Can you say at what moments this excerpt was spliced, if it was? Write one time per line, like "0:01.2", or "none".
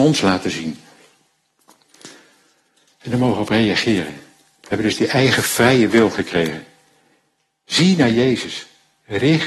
none